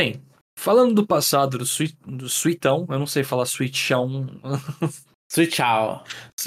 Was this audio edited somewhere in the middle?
no; 0 cuts

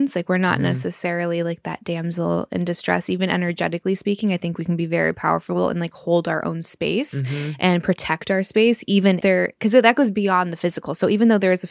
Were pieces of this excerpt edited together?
yes; 1 cut; at 9.2 s

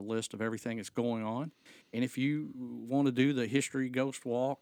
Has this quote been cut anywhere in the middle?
no; 0 cuts

